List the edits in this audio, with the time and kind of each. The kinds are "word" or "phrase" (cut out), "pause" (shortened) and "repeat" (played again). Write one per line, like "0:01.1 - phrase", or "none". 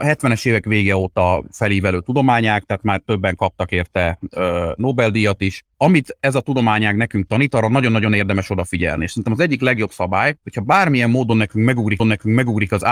0:12.0 - repeat

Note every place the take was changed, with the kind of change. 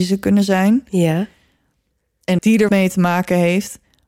0:02.4 - word
0:02.7 - word

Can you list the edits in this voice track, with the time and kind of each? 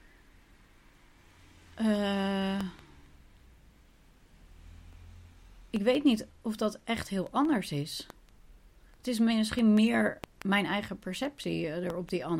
none

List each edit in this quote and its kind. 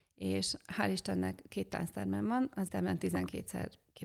0:02.7 - word

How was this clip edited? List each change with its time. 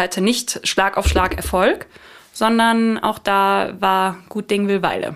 none

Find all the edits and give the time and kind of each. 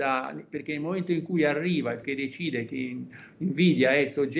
0:02.0 - word

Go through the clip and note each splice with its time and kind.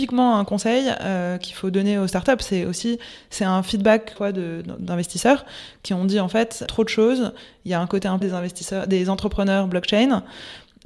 0:04.2 - phrase
0:06.7 - phrase
0:08.2 - phrase

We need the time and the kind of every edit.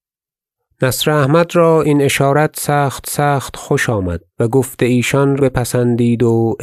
0:03.0 - repeat
0:04.3 - pause
0:05.4 - word

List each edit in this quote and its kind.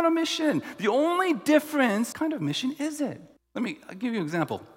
0:02.1 - phrase
0:03.4 - pause

